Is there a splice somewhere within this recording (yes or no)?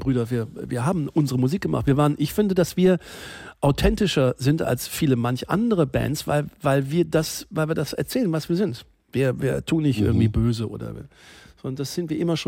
no